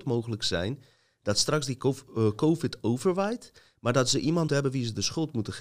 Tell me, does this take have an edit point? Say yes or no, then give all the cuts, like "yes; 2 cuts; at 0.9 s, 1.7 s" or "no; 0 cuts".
yes; 1 cut; at 4.5 s